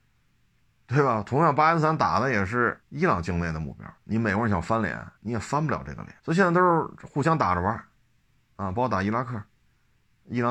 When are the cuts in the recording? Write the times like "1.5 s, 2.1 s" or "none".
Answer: 2.8 s, 4.0 s, 5.2 s, 6.2 s